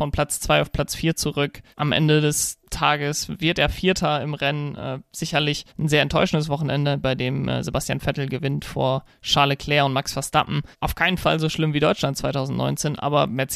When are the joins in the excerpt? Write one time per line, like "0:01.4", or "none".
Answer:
0:01.7
0:02.6
0:05.7
0:10.7